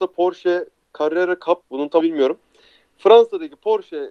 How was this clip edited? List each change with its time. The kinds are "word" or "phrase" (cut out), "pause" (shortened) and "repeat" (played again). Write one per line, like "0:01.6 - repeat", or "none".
0:01.6 - pause
0:02.0 - word